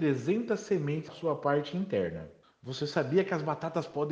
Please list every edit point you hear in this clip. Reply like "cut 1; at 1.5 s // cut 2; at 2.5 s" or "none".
cut 1; at 1.1 s // cut 2; at 2.4 s

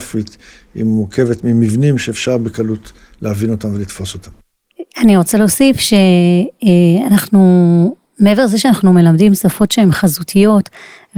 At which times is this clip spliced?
none

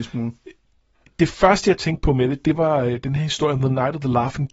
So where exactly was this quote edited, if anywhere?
none

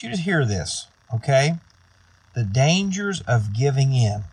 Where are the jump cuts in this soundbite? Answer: none

